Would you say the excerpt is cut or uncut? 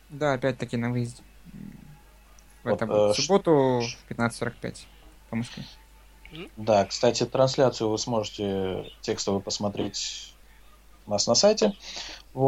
uncut